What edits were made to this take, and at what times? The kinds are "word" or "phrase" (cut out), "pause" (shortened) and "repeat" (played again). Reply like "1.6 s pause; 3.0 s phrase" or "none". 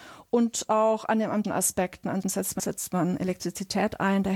1.4 s word; 2.2 s word; 2.6 s phrase